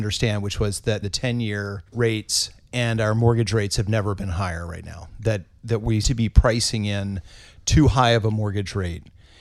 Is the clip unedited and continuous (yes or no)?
no